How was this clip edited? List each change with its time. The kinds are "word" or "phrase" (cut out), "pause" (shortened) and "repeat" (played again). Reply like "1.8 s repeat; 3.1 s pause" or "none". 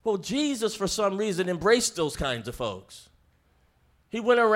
none

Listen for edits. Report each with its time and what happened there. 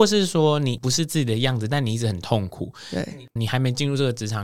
3.4 s word

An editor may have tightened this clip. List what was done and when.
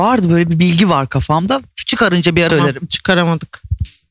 2.5 s word

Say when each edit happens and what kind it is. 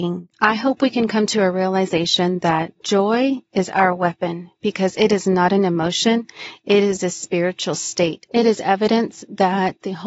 2.8 s pause

